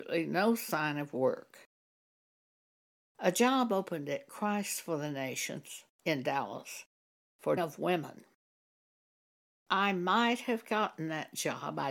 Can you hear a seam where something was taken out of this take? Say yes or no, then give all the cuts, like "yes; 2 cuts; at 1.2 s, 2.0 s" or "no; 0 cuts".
yes; 1 cut; at 7.6 s